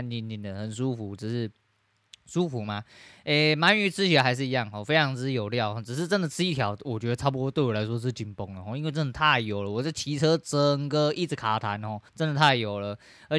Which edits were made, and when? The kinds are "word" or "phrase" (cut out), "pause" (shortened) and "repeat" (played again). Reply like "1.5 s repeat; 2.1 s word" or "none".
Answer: 12.1 s pause